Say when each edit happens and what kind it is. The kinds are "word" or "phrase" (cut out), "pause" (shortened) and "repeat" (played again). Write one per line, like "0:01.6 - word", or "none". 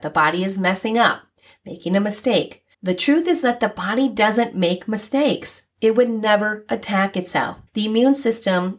0:02.7 - pause
0:07.7 - pause